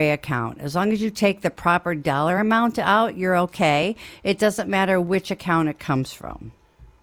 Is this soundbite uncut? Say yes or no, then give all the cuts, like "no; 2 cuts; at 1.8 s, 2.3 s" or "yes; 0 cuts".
yes; 0 cuts